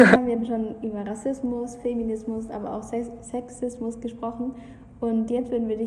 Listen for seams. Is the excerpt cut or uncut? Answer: uncut